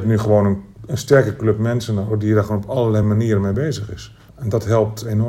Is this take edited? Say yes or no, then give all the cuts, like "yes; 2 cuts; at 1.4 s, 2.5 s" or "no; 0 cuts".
no; 0 cuts